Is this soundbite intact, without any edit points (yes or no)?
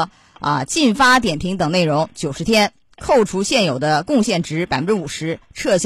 yes